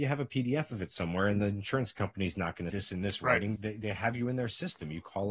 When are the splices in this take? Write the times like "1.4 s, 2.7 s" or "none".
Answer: 2.7 s